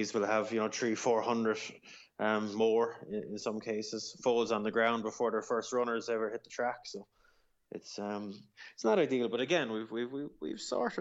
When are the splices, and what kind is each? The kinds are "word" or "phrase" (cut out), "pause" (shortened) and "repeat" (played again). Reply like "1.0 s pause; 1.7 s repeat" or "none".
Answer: none